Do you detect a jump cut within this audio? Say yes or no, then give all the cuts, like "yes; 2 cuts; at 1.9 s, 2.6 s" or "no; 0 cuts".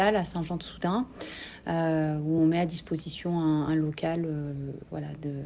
no; 0 cuts